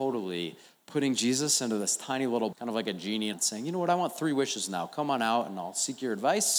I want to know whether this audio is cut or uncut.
cut